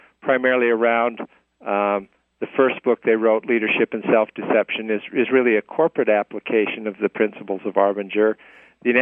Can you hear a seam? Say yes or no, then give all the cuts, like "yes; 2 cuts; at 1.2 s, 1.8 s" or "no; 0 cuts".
no; 0 cuts